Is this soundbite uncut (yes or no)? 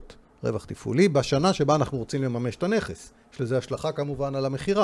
yes